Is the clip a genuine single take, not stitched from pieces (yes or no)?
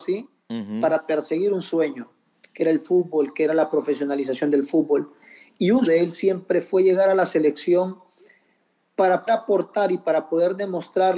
no